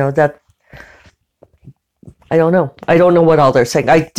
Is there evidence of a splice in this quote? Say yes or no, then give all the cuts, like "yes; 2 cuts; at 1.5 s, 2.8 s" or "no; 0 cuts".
yes; 1 cut; at 2.2 s